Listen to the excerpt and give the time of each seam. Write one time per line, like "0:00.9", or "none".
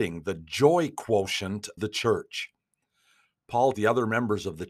0:01.8
0:03.7